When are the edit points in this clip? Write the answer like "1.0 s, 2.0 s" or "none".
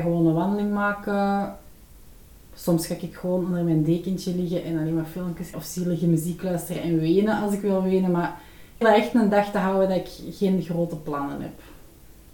5.5 s, 8.8 s